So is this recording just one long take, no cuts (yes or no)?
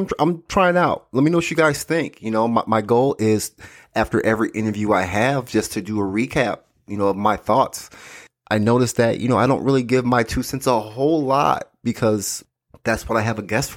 yes